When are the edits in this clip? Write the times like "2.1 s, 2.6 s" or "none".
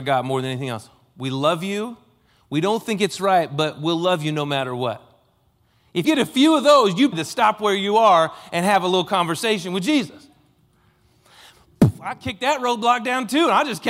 6.0 s, 7.1 s